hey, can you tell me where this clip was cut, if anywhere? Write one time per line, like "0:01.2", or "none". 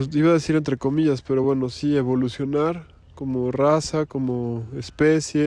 none